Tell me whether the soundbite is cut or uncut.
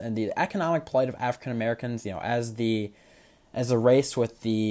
uncut